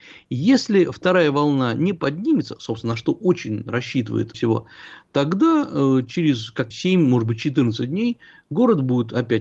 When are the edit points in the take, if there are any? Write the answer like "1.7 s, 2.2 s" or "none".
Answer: 4.3 s, 6.7 s

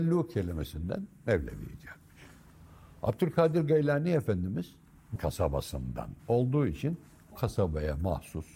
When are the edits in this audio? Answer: 5.2 s, 6.2 s, 7.3 s

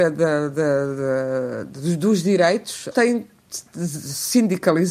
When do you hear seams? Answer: 2.9 s

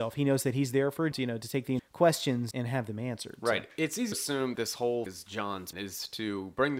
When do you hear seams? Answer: 1.1 s, 1.8 s, 2.5 s, 4.1 s, 4.5 s, 5.1 s, 5.7 s

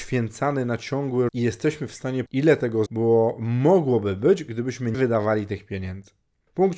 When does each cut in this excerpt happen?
1.3 s, 2.3 s, 2.9 s, 4.9 s

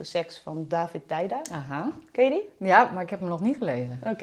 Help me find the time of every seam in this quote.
none

